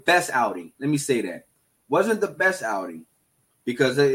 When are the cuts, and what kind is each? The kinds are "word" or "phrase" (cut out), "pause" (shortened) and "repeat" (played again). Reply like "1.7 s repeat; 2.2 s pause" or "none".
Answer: none